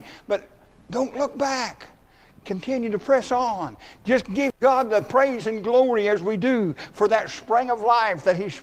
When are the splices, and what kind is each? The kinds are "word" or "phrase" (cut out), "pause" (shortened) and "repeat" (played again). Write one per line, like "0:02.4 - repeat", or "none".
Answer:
none